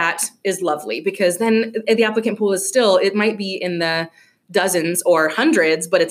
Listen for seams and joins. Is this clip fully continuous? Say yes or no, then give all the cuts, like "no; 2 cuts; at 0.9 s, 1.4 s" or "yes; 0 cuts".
yes; 0 cuts